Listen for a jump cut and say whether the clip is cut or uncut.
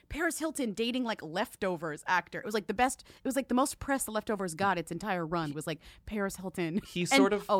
uncut